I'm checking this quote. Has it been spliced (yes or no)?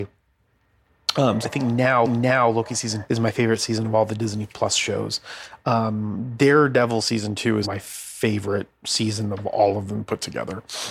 yes